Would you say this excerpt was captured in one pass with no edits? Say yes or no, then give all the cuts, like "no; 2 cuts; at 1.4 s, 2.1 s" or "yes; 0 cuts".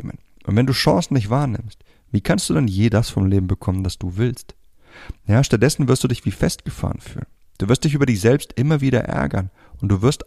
yes; 0 cuts